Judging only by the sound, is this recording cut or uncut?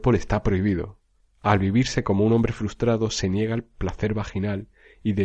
uncut